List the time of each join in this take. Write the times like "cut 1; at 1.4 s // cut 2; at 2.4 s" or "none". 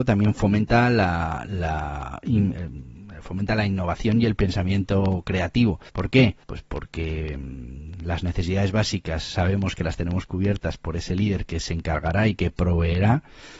cut 1; at 5.9 s // cut 2; at 6.4 s